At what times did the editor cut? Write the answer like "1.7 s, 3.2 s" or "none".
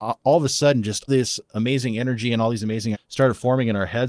1.1 s, 2.9 s